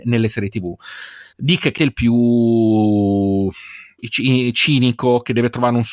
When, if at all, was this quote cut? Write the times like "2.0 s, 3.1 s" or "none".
1.3 s, 1.8 s, 4.0 s